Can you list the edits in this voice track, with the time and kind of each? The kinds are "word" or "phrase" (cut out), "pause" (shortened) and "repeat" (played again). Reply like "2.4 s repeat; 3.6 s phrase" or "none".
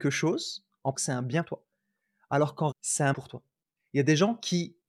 0.9 s word; 1.4 s word; 2.7 s word; 3.1 s word